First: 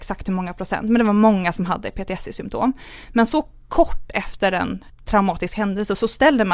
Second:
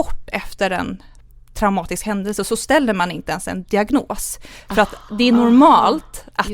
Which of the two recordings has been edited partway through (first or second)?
first